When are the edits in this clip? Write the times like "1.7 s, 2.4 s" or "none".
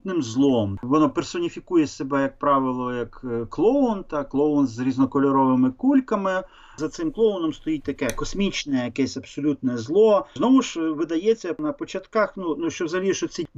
none